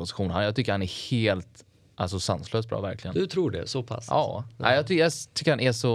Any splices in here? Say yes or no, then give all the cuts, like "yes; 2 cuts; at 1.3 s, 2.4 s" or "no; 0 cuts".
no; 0 cuts